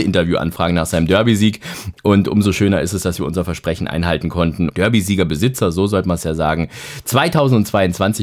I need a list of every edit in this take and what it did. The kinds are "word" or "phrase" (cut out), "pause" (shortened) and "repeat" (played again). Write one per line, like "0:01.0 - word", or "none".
0:04.7 - phrase